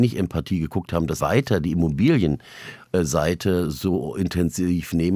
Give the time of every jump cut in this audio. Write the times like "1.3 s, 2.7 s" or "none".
1.2 s